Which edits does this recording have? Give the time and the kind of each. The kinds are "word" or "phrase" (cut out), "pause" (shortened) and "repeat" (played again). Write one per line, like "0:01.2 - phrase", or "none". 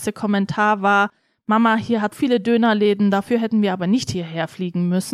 0:02.1 - word